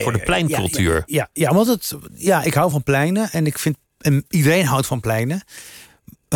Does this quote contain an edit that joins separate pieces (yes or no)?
no